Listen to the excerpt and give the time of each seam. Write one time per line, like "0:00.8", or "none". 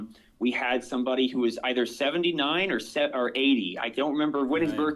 none

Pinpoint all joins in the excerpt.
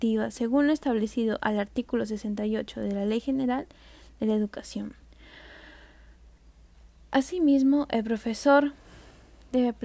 none

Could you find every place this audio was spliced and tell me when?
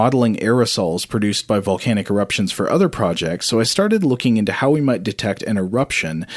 none

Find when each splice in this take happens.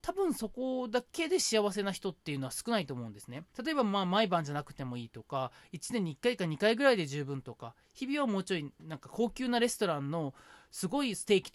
0:02.2
0:03.5

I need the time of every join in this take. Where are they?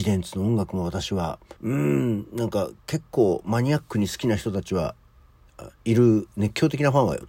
0:01.6

